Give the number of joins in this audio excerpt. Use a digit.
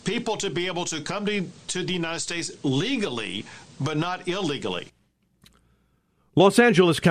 0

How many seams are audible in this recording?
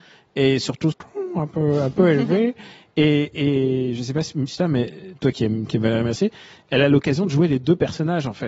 2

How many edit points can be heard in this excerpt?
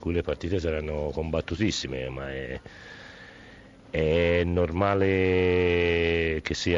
0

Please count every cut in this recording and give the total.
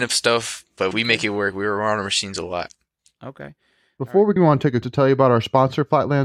3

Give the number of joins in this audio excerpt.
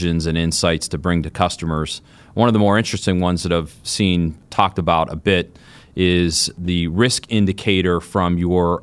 0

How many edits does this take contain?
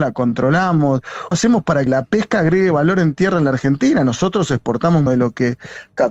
3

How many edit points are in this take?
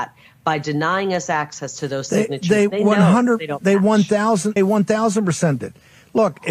2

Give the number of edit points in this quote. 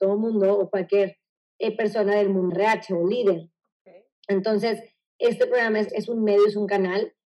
2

